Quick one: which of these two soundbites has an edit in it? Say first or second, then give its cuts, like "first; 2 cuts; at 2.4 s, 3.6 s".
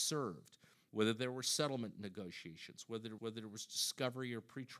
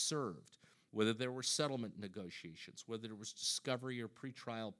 first; 1 cut; at 3.2 s